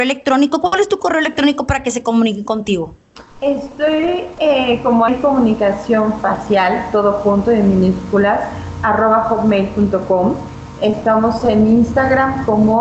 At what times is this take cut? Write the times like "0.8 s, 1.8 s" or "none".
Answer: 3.3 s, 5.1 s